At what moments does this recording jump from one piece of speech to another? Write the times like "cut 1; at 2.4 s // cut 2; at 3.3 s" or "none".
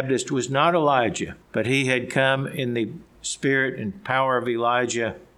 cut 1; at 1.4 s